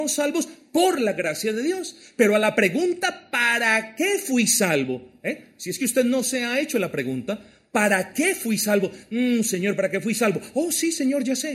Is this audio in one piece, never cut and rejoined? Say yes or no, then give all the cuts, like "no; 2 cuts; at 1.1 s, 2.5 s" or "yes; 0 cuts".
yes; 0 cuts